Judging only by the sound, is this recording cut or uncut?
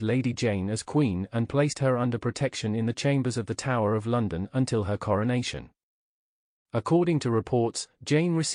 uncut